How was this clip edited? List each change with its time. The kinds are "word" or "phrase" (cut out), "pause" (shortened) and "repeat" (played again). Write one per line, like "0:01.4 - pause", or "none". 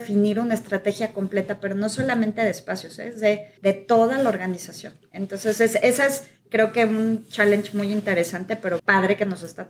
0:03.6 - pause
0:08.8 - word